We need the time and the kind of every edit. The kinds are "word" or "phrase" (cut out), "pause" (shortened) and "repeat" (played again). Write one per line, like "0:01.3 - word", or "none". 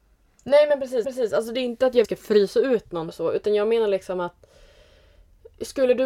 0:01.0 - repeat
0:02.0 - phrase
0:03.1 - word